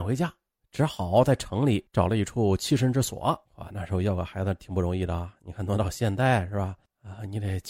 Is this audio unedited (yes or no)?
no